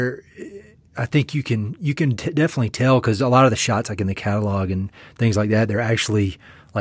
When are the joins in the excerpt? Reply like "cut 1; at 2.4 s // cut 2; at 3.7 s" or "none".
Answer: none